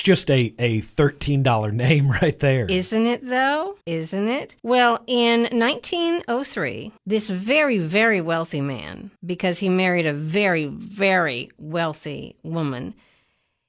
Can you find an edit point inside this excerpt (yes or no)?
yes